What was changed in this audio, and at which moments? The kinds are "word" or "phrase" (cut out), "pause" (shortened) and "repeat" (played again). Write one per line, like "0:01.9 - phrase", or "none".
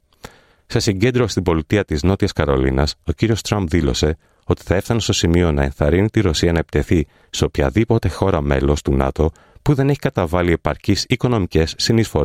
none